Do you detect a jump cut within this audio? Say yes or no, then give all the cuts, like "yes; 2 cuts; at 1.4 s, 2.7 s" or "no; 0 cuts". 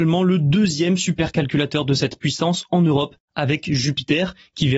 no; 0 cuts